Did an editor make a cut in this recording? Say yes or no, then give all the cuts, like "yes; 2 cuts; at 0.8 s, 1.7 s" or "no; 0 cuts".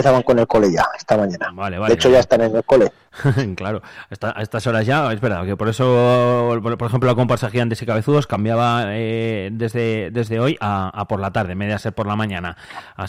no; 0 cuts